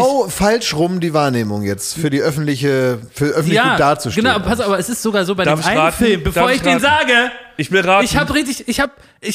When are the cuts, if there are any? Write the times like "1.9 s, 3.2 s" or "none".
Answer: none